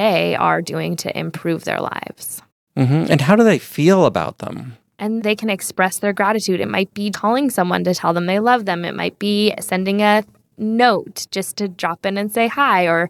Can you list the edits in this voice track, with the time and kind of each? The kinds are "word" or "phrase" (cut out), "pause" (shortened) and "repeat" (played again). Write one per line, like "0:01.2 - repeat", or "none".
0:05.2 - word
0:07.1 - word